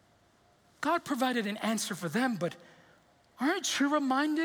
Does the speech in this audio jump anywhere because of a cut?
no; 0 cuts

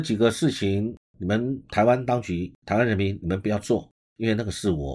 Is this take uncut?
no; 2 cuts; at 1.6 s, 2.6 s

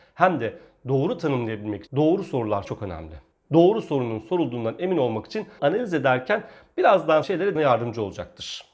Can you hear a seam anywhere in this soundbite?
yes; 6 cuts; at 1.9 s, 2.6 s, 3.3 s, 5.6 s, 7.2 s, 7.5 s

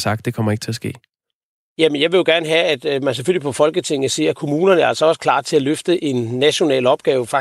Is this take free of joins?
yes; 0 cuts

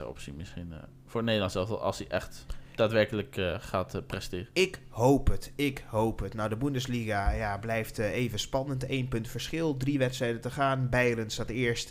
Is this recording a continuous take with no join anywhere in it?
yes; 0 cuts

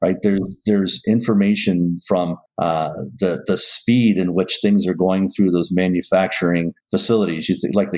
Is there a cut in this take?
yes; 2 cuts; at 2.5 s, 6.8 s

